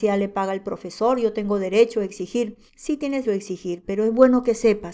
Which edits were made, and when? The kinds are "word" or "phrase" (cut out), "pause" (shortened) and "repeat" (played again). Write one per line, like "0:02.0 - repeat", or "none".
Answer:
0:02.7 - pause
0:03.2 - word